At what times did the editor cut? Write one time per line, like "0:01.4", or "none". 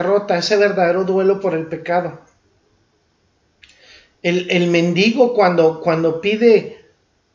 none